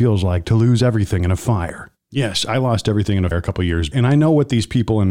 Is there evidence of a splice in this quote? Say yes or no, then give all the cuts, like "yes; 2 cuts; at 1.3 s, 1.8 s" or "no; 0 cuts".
yes; 2 cuts; at 3.3 s, 3.9 s